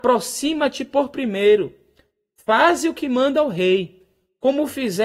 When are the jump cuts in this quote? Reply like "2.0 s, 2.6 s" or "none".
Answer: none